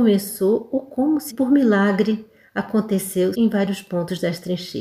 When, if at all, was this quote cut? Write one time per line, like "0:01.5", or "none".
0:01.3
0:03.3